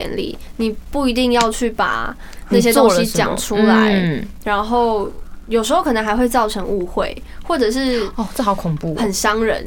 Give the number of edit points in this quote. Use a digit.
0